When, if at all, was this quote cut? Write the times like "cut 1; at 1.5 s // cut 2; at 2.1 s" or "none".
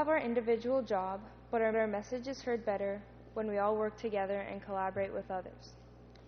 cut 1; at 1.7 s